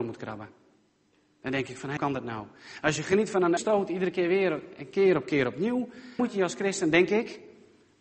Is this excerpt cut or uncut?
cut